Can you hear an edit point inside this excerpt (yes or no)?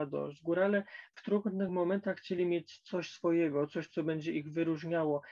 no